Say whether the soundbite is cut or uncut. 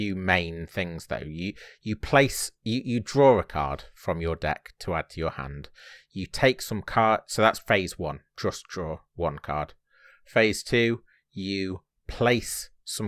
uncut